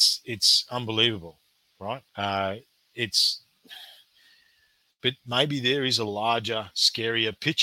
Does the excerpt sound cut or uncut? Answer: cut